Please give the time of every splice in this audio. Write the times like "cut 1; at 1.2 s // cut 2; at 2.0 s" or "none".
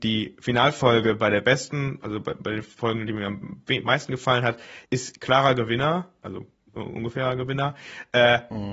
cut 1; at 4.8 s